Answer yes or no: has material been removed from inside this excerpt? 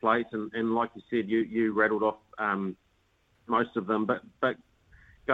no